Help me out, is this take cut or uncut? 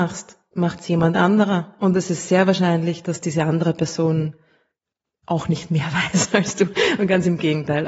uncut